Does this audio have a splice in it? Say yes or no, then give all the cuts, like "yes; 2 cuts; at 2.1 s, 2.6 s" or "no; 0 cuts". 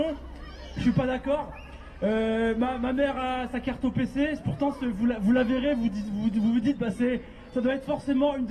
no; 0 cuts